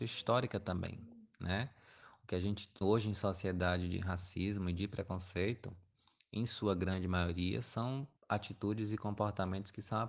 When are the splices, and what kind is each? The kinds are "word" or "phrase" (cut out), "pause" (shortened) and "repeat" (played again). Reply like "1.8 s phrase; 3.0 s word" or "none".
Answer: 2.8 s word; 8.2 s pause